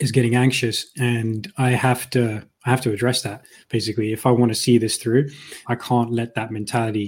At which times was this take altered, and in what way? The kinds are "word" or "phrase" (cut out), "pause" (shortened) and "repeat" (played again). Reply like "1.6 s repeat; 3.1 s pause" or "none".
5.6 s word